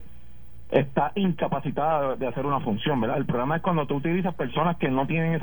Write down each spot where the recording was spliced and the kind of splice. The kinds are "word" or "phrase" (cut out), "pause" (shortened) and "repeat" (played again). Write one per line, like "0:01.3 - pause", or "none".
none

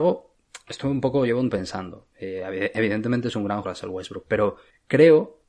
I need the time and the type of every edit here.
0:01.5 - word
0:03.6 - word

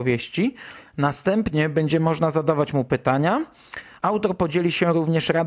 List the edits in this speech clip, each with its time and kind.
none

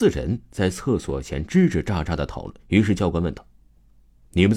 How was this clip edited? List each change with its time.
0:02.6 - pause

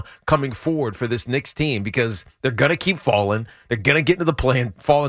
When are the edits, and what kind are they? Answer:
none

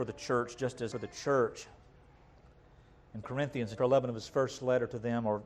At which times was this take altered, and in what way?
0:00.9 - phrase
0:03.2 - phrase
0:03.8 - word

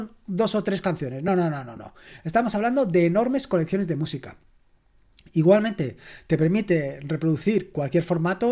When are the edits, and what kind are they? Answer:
none

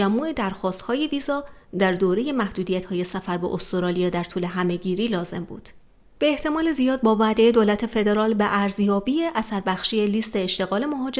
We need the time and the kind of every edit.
0:05.9 - pause

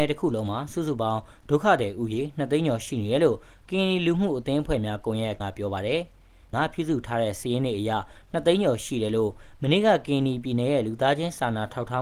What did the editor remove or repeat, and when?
0:05.4 - word
0:06.5 - word

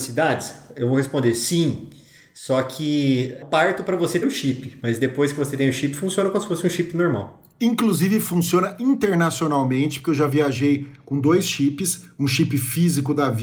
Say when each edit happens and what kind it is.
0:03.4 - word
0:04.2 - word

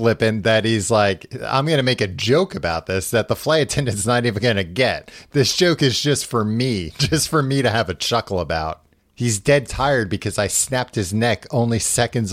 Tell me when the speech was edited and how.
0:09.0 - pause

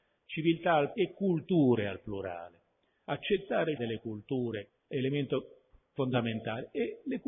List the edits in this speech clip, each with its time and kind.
0:00.9 - word
0:03.8 - phrase
0:04.7 - word

